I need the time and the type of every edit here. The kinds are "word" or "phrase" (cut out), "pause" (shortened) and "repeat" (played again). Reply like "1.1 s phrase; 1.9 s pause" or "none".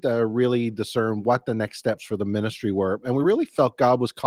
none